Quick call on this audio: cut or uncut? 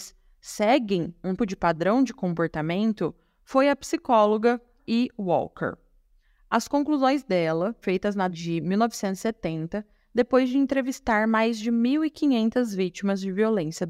cut